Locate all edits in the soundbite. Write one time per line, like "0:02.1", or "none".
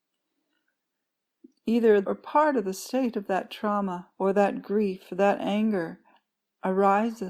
0:02.0
0:04.1